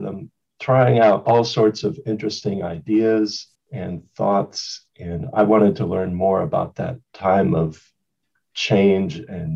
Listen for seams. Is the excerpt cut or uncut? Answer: cut